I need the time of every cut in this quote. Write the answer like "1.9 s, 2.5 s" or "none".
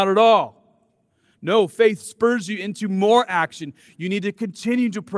none